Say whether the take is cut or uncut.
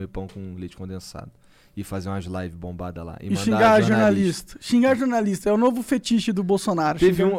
uncut